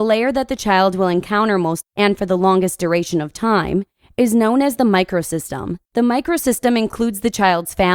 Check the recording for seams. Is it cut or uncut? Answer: cut